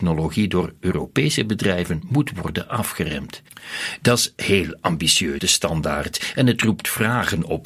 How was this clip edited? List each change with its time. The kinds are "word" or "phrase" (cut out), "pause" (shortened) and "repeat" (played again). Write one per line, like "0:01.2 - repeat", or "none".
0:05.4 - word